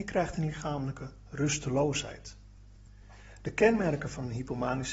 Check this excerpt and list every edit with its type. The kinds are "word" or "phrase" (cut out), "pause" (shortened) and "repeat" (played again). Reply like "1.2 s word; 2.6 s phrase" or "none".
none